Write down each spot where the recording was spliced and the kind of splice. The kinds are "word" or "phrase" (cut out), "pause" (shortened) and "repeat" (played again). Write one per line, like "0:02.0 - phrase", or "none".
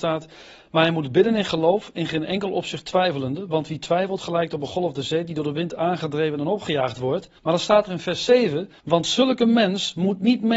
0:07.4 - pause
0:08.8 - pause